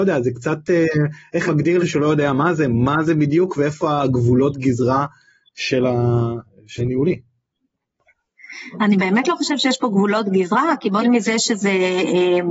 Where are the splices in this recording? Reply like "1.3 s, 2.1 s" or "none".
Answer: 1.5 s, 1.8 s, 6.8 s, 11.0 s